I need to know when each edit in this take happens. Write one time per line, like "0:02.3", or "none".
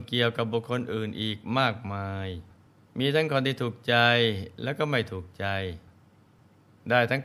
0:02.7